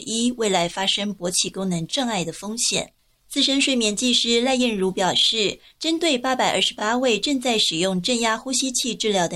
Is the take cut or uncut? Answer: uncut